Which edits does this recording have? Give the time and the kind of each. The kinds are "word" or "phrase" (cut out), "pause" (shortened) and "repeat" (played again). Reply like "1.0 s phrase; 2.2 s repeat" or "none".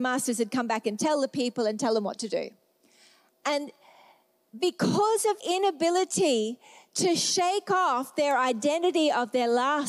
5.4 s word

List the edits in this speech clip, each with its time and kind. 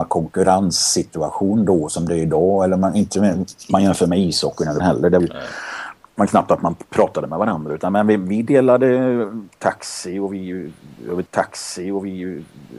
4.8 s word; 5.2 s word; 11.3 s repeat

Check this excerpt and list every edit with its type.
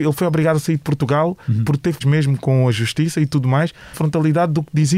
2.0 s word; 3.9 s word

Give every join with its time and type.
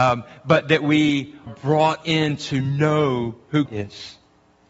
1.5 s word; 3.7 s word

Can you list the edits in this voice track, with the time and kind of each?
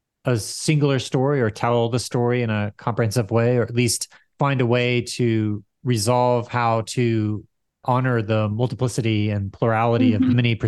none

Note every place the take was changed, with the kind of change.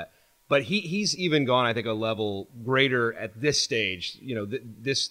none

